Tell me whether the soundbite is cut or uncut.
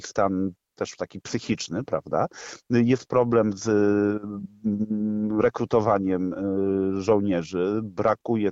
uncut